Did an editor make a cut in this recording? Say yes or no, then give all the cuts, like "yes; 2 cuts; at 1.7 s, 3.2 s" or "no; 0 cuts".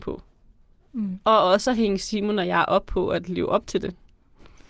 no; 0 cuts